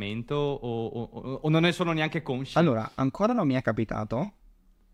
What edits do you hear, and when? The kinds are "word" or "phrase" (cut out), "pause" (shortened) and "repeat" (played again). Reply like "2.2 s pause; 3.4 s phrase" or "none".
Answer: none

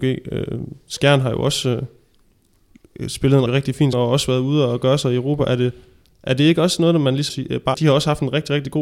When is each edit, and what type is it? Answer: 3.5 s word; 3.9 s word; 7.3 s word; 7.7 s word

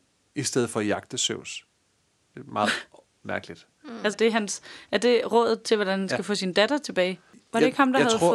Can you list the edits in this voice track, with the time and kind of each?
4.1 s word

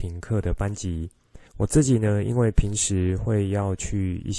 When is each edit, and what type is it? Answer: 1.5 s pause

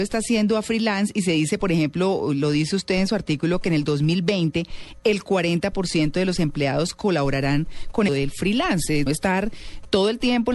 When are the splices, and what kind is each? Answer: 8.1 s phrase; 9.1 s phrase

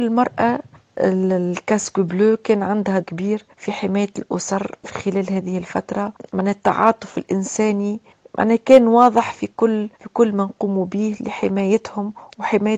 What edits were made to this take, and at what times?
3.0 s word; 3.5 s pause; 9.9 s pause

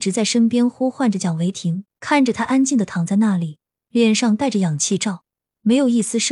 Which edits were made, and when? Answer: 1.9 s pause

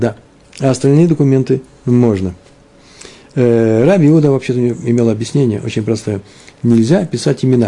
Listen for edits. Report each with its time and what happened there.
none

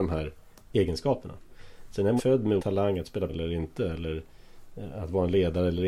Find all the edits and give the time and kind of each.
2.2 s word; 2.6 s word; 3.3 s word

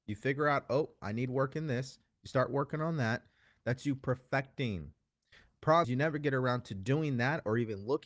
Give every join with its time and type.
5.8 s word

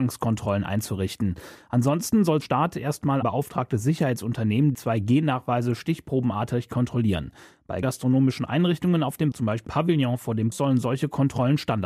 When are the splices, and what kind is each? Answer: 2.4 s word; 3.2 s word; 4.7 s word; 7.8 s word; 9.3 s word; 9.7 s word; 10.5 s word

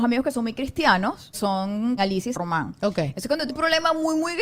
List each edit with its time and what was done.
1.3 s word; 2.0 s word; 2.3 s word; 3.5 s word

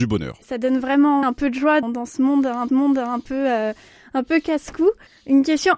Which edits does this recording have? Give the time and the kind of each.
1.2 s word; 1.8 s word; 2.7 s repeat

